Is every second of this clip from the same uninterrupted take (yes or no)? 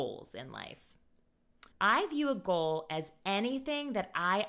no